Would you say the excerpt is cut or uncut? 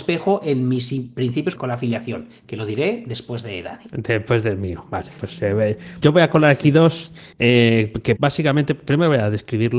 cut